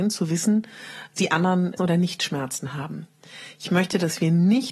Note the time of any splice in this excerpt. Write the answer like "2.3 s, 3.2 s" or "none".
1.2 s, 1.8 s